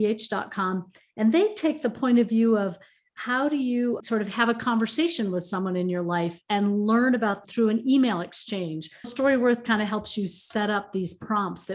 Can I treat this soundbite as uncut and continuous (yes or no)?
no